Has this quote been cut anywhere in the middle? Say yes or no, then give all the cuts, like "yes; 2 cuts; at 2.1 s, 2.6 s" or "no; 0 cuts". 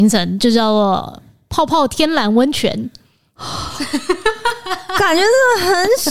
no; 0 cuts